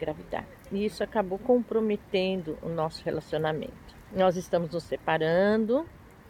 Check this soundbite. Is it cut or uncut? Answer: cut